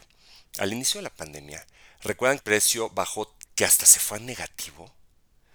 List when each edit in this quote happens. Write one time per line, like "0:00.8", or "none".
0:02.4
0:03.4